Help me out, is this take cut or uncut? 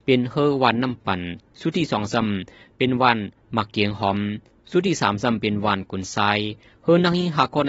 uncut